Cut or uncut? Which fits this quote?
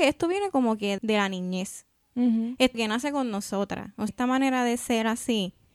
cut